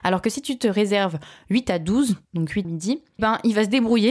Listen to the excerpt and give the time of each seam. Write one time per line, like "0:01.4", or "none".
0:02.2
0:02.6
0:03.2